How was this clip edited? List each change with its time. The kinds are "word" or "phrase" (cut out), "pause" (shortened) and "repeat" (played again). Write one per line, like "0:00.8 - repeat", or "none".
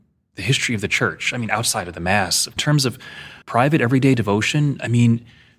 0:02.6 - phrase
0:03.4 - pause